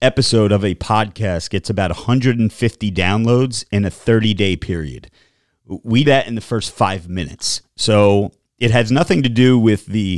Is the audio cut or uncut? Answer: cut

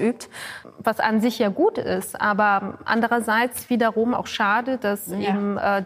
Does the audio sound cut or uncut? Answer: uncut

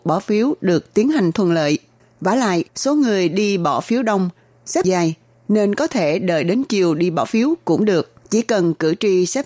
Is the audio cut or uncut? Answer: cut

